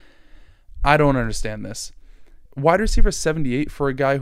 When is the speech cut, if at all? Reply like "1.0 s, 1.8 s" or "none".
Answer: 2.5 s